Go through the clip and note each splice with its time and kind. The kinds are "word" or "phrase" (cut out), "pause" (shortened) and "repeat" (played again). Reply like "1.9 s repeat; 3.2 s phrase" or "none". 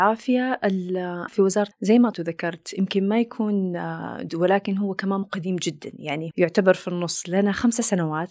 1.3 s word; 1.7 s word; 2.1 s word; 4.3 s word; 5.2 s word; 6.3 s word